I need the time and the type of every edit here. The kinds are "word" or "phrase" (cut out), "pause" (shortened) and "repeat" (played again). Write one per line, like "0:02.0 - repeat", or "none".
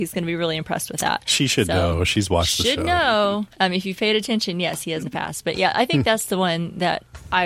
0:03.5 - pause
0:05.0 - phrase